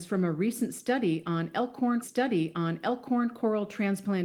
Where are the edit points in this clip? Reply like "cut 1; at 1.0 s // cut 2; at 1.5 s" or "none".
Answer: cut 1; at 2.0 s